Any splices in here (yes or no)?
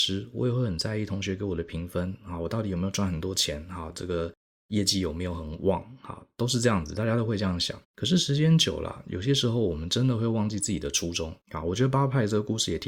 yes